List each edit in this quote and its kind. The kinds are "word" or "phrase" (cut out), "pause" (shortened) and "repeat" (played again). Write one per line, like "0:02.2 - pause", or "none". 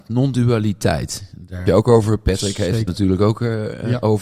0:01.7 - phrase
0:02.9 - word